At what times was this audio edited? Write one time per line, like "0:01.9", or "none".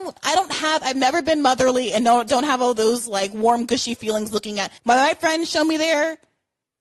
0:04.8